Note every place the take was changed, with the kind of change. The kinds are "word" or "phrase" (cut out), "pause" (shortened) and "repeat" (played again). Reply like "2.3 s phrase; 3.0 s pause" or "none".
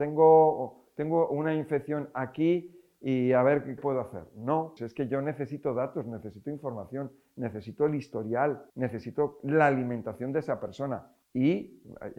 3.8 s phrase; 4.8 s word; 8.7 s pause; 11.2 s pause